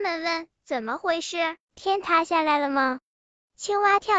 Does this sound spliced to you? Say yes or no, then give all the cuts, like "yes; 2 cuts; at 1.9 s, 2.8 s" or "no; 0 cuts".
no; 0 cuts